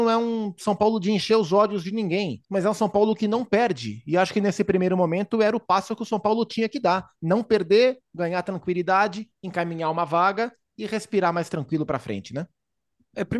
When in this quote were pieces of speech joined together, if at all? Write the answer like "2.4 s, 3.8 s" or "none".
2.4 s

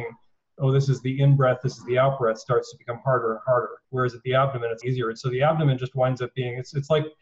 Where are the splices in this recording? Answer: 3.8 s, 4.8 s

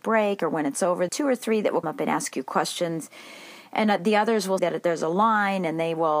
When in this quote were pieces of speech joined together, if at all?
1.1 s, 1.8 s, 4.6 s

